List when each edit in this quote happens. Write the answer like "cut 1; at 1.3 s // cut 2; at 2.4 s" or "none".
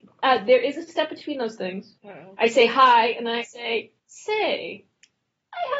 cut 1; at 2.0 s // cut 2; at 4.0 s